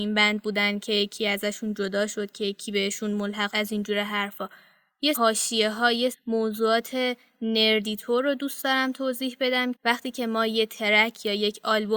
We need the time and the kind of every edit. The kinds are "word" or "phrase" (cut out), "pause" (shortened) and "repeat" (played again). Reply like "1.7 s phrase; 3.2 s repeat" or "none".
3.5 s word; 5.1 s word; 6.1 s word; 9.8 s word